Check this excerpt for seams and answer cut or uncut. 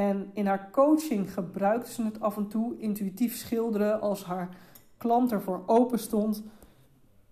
uncut